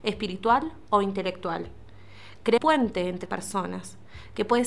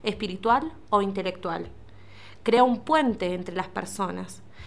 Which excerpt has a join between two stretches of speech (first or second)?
first